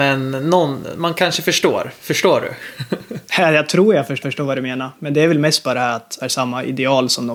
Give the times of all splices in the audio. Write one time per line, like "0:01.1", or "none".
0:04.2
0:06.2